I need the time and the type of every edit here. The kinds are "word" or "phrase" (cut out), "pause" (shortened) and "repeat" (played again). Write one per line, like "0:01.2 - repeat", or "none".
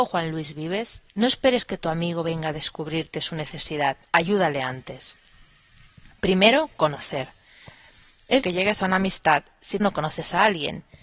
0:01.1 - pause
0:04.1 - pause
0:08.4 - word
0:09.8 - word